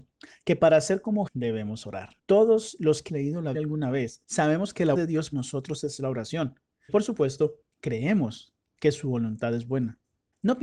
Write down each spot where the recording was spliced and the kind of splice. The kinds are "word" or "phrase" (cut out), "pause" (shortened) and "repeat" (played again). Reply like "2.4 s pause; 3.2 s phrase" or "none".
1.3 s word; 3.1 s word; 3.5 s word; 4.9 s word; 5.3 s word; 6.9 s word